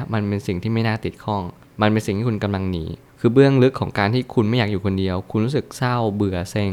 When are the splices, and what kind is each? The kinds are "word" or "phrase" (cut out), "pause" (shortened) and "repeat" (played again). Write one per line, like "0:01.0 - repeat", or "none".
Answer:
none